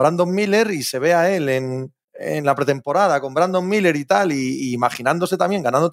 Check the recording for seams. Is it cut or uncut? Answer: cut